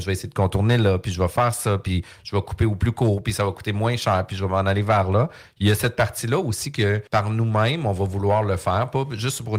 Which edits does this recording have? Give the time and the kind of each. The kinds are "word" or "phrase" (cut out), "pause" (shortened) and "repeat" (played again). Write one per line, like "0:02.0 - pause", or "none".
0:07.1 - pause